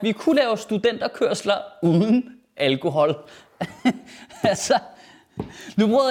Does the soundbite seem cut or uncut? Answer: uncut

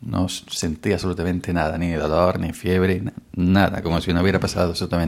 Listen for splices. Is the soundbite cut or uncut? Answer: uncut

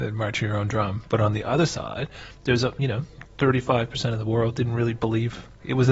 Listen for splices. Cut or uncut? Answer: cut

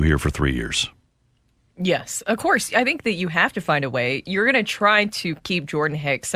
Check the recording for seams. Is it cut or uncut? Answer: uncut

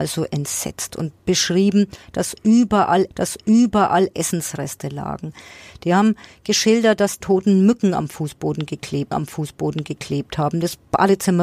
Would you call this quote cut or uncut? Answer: cut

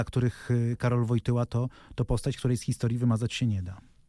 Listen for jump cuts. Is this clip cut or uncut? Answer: uncut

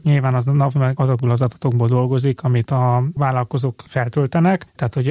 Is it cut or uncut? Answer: uncut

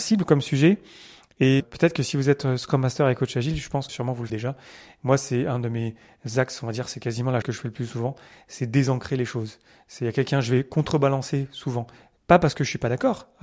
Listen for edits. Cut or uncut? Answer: cut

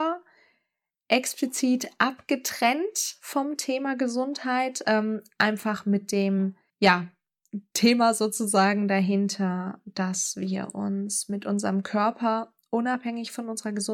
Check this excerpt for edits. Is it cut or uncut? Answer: cut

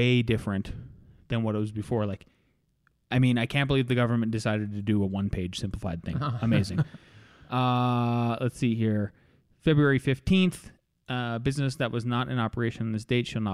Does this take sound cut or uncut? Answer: uncut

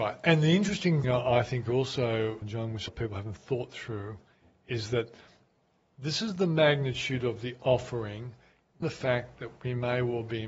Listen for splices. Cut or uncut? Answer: cut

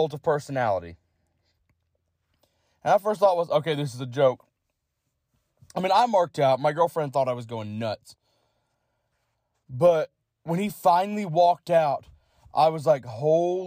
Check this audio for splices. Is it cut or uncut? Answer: uncut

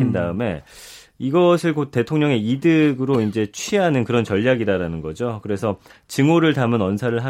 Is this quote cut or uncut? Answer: uncut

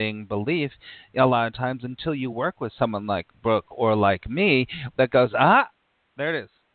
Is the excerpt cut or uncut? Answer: uncut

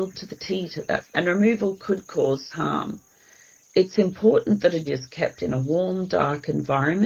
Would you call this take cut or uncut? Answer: cut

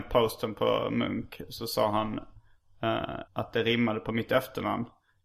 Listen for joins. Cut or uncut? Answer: cut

